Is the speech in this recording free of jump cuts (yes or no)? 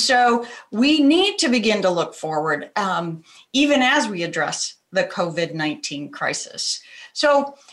yes